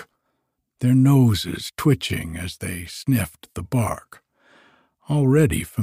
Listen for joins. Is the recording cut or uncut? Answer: uncut